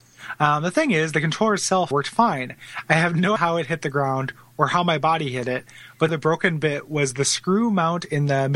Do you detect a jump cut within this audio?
yes; 3 cuts; at 1.9 s, 3.4 s, 6.1 s

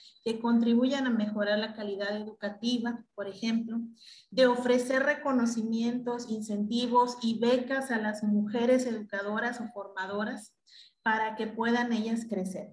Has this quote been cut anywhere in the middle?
no; 0 cuts

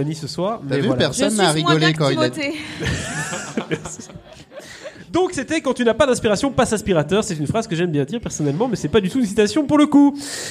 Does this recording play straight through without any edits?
yes; 0 cuts

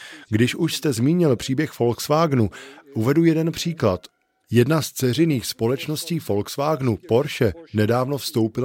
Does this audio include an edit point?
no; 0 cuts

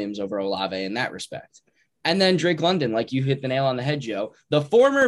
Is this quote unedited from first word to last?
yes; 0 cuts

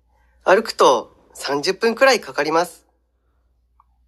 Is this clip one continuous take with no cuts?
yes; 0 cuts

